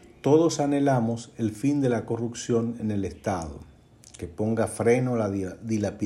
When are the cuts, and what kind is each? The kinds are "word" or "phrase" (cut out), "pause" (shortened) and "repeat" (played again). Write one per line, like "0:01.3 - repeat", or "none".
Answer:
none